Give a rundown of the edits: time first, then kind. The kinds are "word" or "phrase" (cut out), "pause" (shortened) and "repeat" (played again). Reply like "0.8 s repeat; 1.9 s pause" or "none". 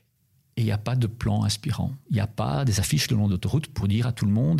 none